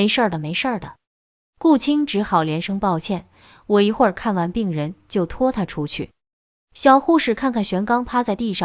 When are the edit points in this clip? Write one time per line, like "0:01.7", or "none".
none